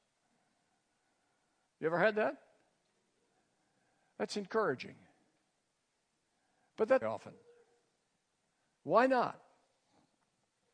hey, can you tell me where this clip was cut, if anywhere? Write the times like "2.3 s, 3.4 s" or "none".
7.0 s